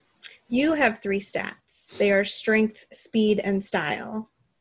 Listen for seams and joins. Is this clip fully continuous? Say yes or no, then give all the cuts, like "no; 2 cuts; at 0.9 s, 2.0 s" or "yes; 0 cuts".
yes; 0 cuts